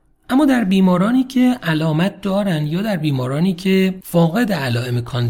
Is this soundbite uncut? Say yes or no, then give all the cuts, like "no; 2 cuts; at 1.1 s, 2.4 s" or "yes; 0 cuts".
yes; 0 cuts